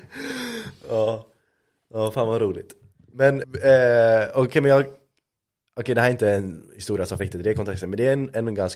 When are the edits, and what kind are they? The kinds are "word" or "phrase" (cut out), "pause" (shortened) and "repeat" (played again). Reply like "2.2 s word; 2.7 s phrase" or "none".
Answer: 3.4 s word; 7.2 s word

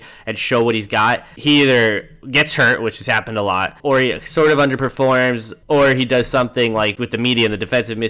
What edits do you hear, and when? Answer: 2.2 s pause; 3.8 s pause; 5.6 s pause

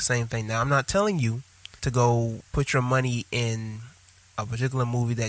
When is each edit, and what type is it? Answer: 1.8 s pause; 2.5 s pause

